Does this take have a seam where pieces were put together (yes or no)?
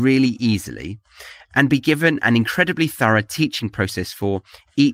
no